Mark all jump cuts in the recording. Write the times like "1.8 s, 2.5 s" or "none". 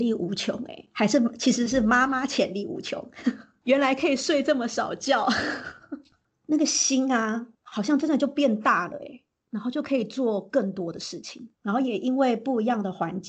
7.5 s, 11.5 s

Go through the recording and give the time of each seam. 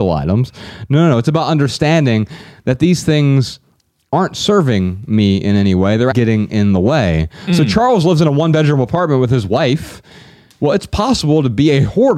6.1 s

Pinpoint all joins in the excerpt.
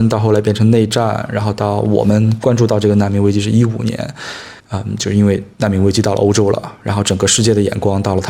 4.6 s, 5.5 s

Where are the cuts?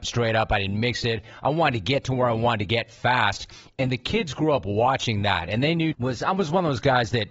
5.9 s

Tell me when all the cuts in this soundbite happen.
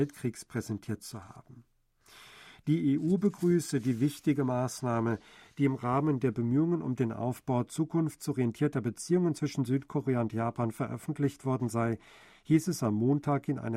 none

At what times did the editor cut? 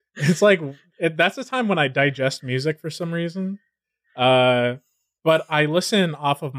none

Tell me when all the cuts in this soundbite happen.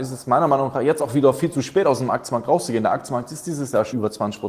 none

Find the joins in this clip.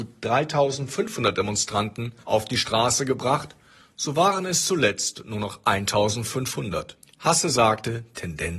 2.2 s, 7.0 s

